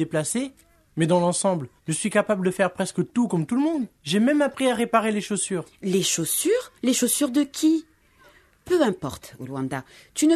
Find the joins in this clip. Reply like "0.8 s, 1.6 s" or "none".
1.8 s, 3.9 s, 6.8 s